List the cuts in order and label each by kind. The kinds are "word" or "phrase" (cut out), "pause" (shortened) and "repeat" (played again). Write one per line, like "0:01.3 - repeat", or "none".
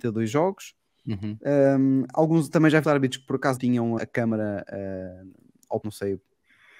0:02.8 - word
0:03.6 - word
0:04.0 - word
0:05.8 - word